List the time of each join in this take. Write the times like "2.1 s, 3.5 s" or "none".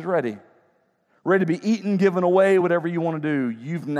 none